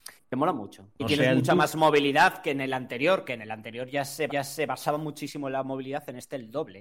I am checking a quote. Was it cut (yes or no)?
yes